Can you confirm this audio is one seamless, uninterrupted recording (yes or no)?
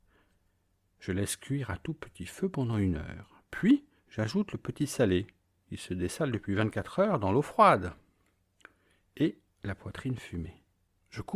no